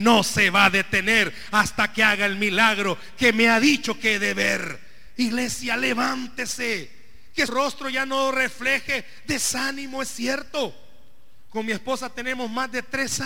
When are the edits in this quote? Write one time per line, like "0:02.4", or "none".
0:07.5